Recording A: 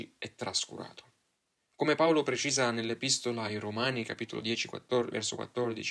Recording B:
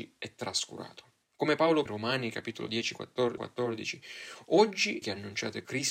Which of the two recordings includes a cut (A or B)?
B